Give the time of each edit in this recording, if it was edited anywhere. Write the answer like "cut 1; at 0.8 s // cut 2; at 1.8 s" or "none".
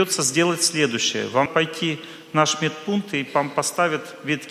cut 1; at 1.5 s